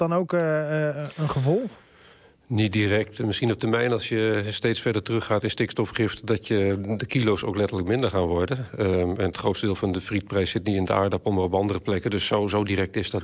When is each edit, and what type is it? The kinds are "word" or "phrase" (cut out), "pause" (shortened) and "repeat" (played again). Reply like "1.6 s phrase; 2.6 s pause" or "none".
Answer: none

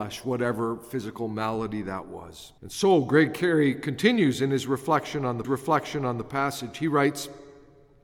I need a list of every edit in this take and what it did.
2.6 s pause; 5.4 s repeat

